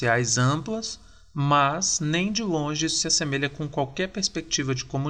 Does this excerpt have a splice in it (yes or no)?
no